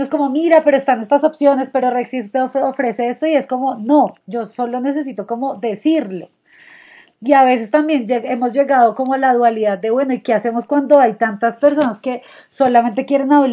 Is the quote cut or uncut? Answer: uncut